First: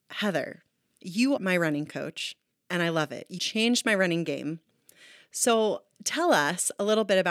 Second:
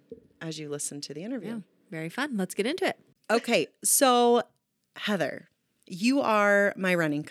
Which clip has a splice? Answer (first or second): first